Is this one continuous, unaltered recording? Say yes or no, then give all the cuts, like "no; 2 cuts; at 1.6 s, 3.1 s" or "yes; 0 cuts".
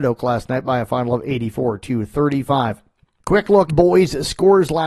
no; 1 cut; at 3.7 s